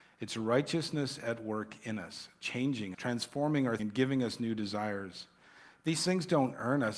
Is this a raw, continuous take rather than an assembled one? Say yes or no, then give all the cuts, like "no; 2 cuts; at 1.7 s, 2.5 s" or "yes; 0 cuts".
no; 2 cuts; at 2.9 s, 3.8 s